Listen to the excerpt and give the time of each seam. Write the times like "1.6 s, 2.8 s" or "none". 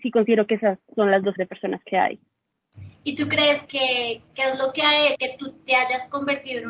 1.4 s, 1.8 s, 3.6 s, 5.1 s